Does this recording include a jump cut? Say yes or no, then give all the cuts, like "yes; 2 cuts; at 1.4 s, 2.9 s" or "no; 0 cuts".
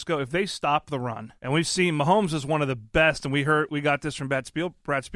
yes; 2 cuts; at 1.4 s, 3.7 s